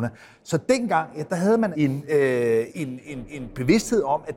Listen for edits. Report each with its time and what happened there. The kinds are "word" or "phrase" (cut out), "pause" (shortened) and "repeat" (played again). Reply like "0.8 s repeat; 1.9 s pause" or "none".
1.7 s word; 2.7 s word; 3.3 s repeat